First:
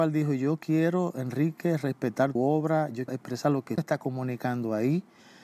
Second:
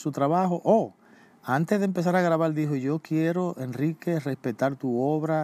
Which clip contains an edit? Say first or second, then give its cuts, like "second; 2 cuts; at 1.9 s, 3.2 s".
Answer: first; 3 cuts; at 2.4 s, 3.1 s, 3.8 s